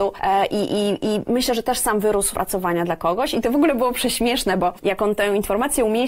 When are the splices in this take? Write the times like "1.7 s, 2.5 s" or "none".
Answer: 2.3 s